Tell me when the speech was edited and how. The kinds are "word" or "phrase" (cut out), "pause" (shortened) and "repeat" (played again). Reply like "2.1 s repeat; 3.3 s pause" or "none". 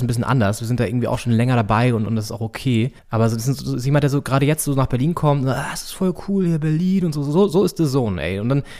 3.0 s pause

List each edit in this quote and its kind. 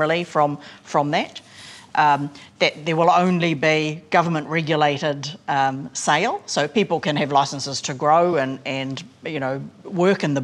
none

